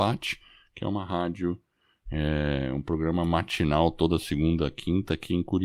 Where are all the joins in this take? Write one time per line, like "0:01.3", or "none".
none